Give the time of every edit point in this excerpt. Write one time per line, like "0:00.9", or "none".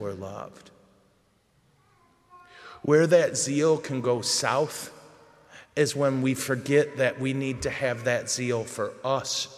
none